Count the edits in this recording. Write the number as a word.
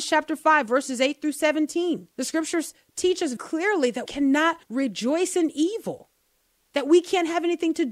four